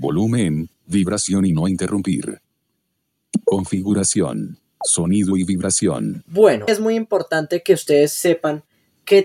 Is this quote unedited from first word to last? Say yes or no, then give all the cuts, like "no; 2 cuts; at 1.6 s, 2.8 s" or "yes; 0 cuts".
no; 1 cut; at 6.7 s